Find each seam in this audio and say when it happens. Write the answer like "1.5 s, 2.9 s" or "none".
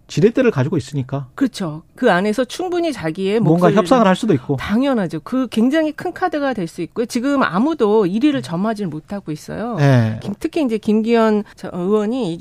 1.9 s, 11.5 s

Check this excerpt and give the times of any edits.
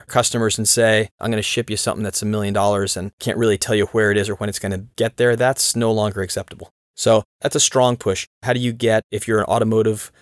none

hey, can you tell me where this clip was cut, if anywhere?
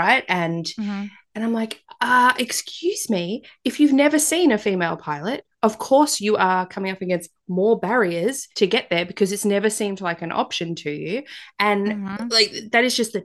8.5 s

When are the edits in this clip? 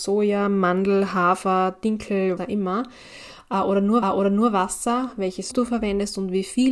2.4 s, 4.0 s, 5.5 s

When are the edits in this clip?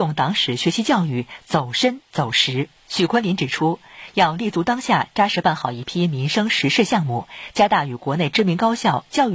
2.8 s

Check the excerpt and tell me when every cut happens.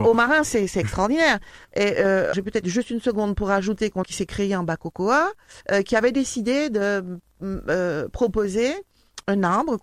2.3 s, 4.0 s, 5.6 s

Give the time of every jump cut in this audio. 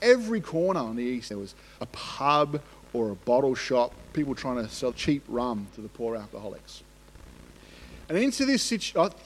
1.3 s, 1.8 s, 4.9 s

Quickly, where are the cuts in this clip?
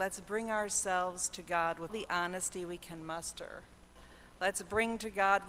1.9 s

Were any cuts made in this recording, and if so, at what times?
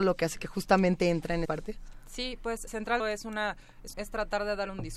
1.4 s, 2.7 s, 3.0 s, 3.9 s

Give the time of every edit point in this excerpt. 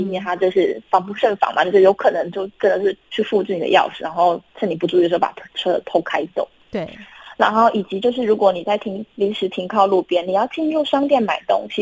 3.0 s, 4.5 s

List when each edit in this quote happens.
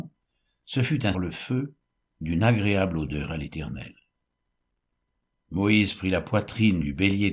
1.1 s

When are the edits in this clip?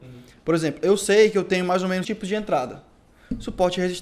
2.0 s

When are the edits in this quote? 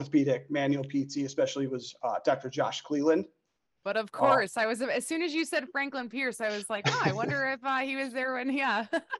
none

